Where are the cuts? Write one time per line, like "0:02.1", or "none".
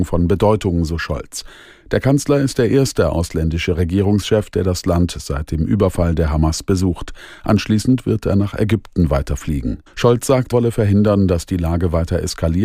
0:09.9
0:10.5